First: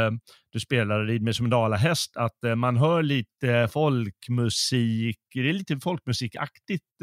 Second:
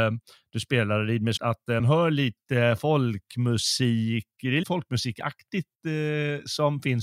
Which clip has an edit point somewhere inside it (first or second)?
second